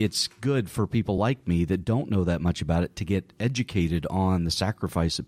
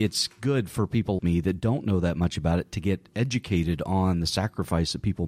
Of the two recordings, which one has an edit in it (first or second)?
second